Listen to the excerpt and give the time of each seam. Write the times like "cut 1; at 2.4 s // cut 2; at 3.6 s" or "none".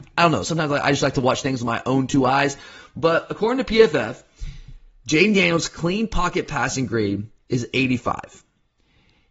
none